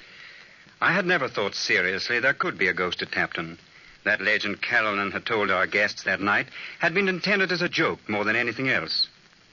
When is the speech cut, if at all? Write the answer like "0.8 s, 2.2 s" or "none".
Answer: none